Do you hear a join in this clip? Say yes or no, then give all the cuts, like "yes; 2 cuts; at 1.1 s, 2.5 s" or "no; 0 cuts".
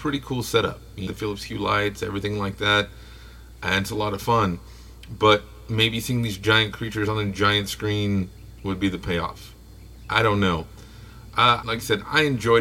yes; 2 cuts; at 1.1 s, 11.6 s